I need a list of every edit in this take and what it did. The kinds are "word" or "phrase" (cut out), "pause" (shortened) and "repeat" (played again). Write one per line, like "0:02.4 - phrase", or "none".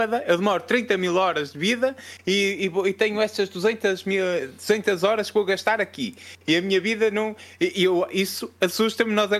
none